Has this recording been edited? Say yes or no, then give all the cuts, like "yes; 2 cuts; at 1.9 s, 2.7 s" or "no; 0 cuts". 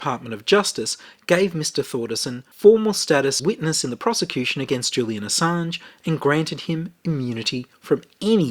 yes; 2 cuts; at 2.5 s, 3.4 s